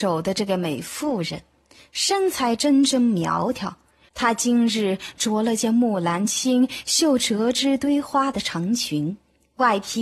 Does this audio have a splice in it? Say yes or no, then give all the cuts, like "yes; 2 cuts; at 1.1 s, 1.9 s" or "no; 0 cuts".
no; 0 cuts